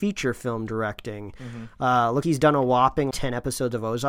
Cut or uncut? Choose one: cut